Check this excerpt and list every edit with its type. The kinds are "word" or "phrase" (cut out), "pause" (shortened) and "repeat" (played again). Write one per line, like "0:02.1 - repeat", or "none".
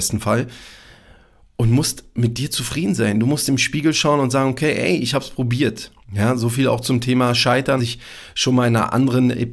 0:06.0 - pause
0:07.8 - word